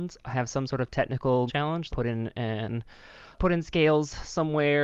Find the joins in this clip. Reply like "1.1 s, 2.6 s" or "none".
1.5 s, 1.9 s, 3.3 s